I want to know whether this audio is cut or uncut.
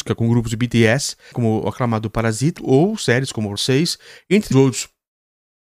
cut